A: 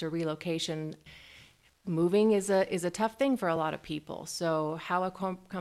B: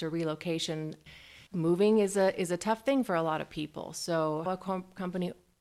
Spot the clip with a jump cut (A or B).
B